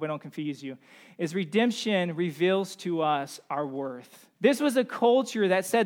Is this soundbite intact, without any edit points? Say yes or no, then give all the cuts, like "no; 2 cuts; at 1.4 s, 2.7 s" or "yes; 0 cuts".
no; 1 cut; at 4.3 s